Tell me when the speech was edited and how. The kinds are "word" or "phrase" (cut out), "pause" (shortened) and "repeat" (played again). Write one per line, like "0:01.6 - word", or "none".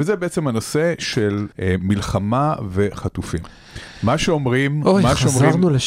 0:01.5 - pause